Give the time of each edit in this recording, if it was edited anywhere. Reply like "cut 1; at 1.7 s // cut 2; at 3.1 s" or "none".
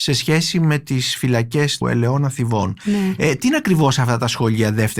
cut 1; at 1.8 s